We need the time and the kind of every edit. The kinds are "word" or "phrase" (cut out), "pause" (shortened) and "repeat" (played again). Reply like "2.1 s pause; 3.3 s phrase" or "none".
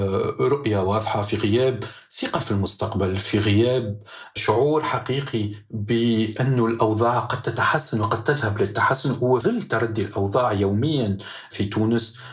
9.4 s word